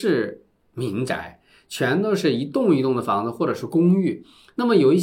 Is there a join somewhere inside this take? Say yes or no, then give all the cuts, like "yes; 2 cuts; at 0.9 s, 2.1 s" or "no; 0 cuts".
no; 0 cuts